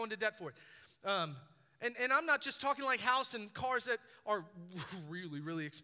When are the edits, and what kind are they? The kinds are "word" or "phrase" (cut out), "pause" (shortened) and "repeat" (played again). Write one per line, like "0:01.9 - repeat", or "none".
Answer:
none

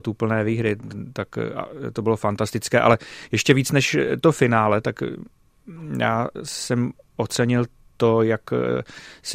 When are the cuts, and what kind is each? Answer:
none

